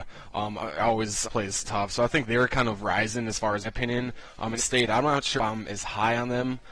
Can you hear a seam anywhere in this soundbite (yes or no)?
yes